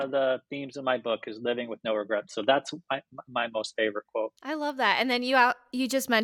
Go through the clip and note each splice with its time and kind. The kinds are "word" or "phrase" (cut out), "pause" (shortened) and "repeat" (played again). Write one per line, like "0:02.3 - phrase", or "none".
0:04.4 - pause